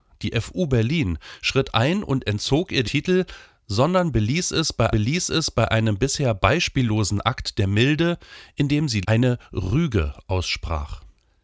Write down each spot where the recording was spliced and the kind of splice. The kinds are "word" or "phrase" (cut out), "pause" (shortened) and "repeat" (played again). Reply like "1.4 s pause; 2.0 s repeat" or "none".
2.8 s word; 4.9 s repeat; 9.0 s word